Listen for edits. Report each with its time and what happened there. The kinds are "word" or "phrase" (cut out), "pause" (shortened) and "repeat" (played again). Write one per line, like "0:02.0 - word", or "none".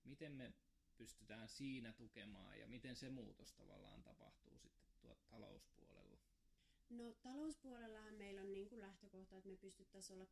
none